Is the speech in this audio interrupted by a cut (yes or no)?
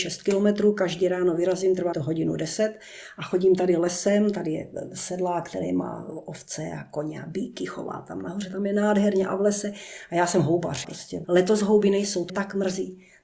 yes